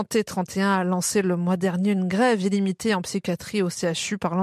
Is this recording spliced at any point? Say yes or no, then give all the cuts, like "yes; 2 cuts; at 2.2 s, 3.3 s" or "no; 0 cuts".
no; 0 cuts